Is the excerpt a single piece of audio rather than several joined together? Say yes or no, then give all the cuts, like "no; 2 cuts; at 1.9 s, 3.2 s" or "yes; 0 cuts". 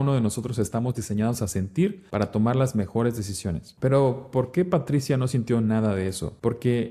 yes; 0 cuts